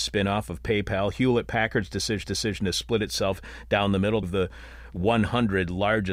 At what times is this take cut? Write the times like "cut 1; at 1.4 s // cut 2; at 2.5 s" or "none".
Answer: cut 1; at 2.2 s // cut 2; at 4.2 s